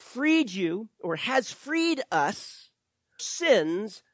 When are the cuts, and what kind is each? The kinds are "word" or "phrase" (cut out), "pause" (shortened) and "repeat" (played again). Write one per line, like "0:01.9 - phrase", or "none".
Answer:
0:03.2 - phrase